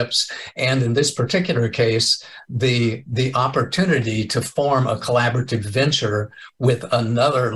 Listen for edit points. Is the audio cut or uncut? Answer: uncut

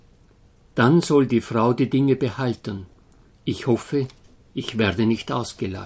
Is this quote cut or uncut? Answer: cut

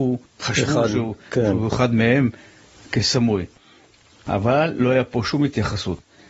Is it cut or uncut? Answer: uncut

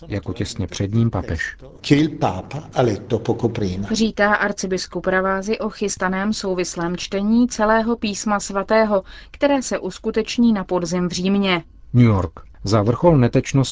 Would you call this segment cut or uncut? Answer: uncut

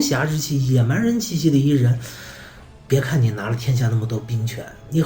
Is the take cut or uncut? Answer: uncut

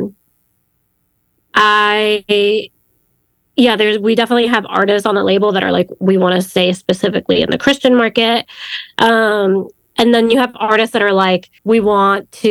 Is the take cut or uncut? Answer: cut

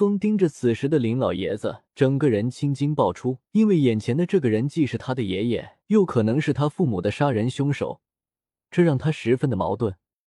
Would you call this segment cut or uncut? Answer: cut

